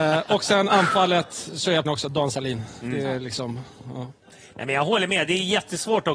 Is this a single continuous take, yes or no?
no